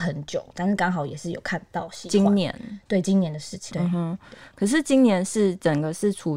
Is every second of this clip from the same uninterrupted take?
no; 1 cut; at 3.7 s

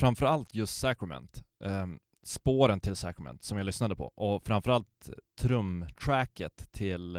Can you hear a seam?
no; 0 cuts

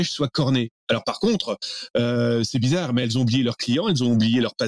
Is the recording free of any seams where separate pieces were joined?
yes; 0 cuts

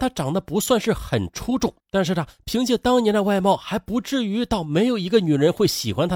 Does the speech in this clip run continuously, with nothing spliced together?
no; 1 cut; at 1.8 s

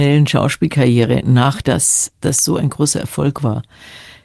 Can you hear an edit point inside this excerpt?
yes; 1 cut; at 1.6 s

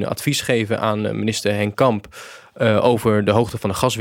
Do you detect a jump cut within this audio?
no; 0 cuts

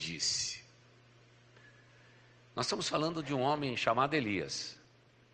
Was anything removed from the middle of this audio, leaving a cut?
no; 0 cuts

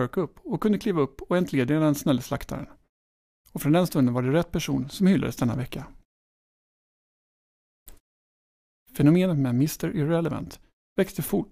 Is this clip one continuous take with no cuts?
yes; 0 cuts

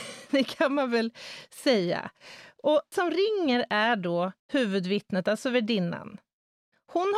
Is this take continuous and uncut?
no; 2 cuts; at 2.9 s, 4.4 s

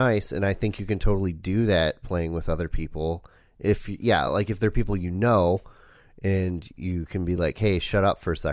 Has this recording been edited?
no; 0 cuts

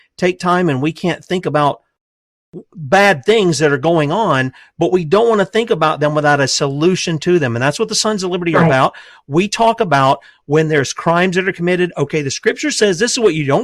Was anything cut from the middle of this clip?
no; 0 cuts

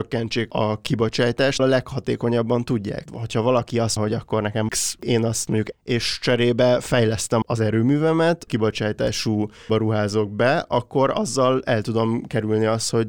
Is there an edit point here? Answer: yes; 9 cuts; at 1.6 s, 3.1 s, 4.0 s, 4.7 s, 5.0 s, 5.7 s, 7.4 s, 8.5 s, 9.7 s

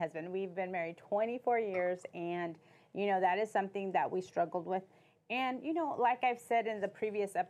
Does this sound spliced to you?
no; 0 cuts

